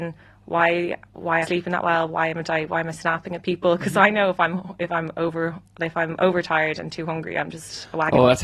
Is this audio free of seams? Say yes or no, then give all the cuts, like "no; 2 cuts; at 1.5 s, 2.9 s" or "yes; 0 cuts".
no; 1 cut; at 1.4 s